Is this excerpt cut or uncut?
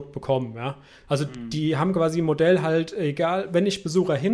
uncut